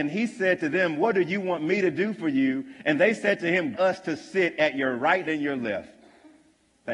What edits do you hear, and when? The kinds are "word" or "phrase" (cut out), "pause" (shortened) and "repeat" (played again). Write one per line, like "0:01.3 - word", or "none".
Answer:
0:03.7 - word
0:05.2 - word